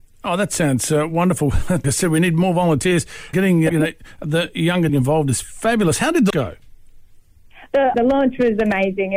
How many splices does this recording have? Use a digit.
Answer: 6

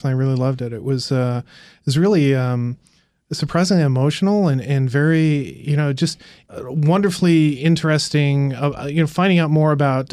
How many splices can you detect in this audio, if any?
0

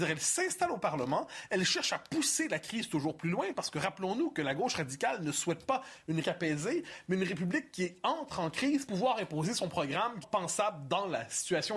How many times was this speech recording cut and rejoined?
3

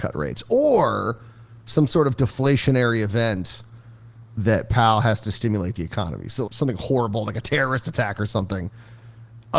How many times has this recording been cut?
1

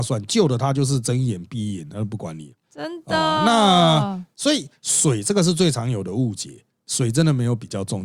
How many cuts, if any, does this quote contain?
1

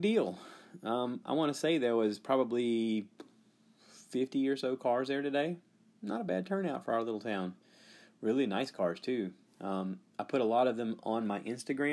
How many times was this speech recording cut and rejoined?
0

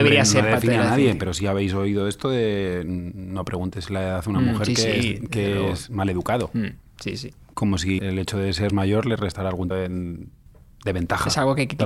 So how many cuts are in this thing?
3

